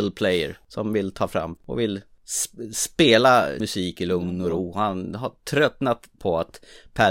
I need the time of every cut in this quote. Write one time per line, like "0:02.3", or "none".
0:01.6
0:03.6
0:06.2